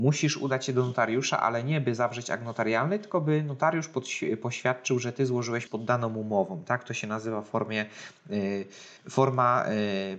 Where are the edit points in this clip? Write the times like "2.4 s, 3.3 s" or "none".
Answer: 5.7 s, 9.0 s